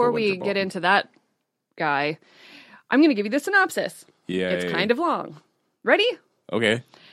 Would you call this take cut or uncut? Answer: uncut